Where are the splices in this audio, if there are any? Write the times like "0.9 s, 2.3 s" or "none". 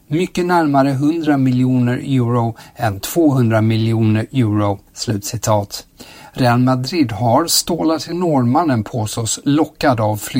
4.9 s, 8.1 s